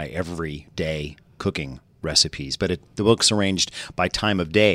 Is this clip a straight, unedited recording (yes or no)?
yes